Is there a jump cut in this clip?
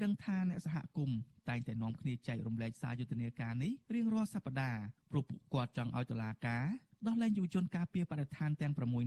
yes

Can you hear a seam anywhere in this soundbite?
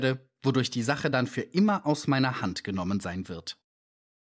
no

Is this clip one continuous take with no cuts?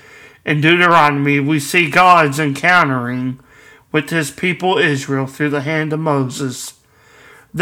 yes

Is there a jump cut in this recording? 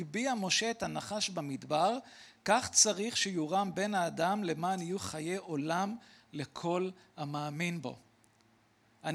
no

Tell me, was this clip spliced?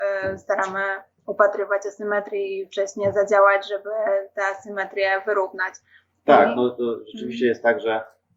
no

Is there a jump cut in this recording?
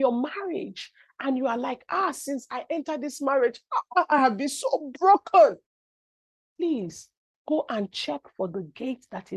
no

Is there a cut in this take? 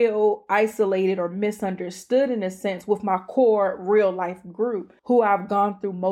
yes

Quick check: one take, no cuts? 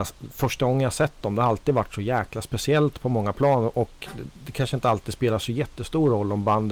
no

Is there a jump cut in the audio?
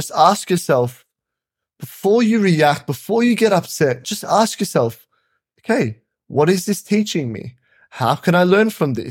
no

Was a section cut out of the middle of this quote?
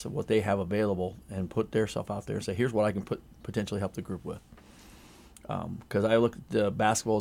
no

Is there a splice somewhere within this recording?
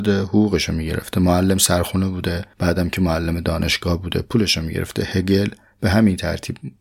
no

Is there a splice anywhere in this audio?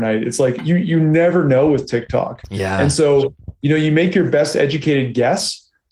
no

